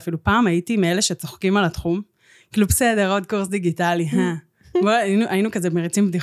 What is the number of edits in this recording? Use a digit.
0